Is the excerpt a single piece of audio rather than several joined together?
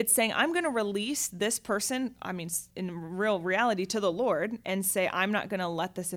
no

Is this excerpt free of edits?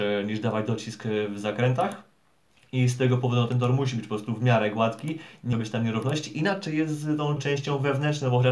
no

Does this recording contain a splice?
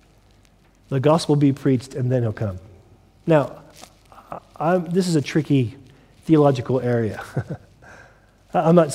no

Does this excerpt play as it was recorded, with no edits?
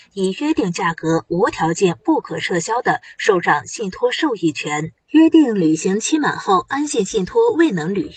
no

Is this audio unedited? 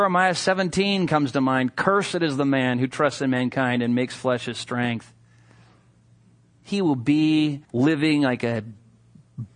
no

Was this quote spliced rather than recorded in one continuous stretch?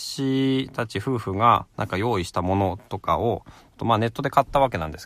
no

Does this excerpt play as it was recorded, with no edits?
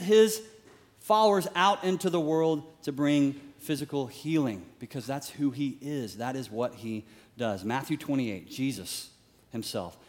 yes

